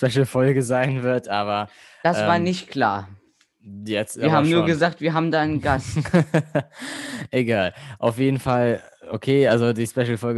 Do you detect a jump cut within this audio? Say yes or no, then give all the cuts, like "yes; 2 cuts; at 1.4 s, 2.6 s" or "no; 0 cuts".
no; 0 cuts